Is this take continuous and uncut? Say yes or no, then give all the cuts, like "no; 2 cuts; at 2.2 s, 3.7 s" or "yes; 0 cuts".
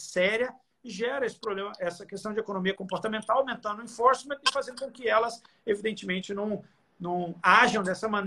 yes; 0 cuts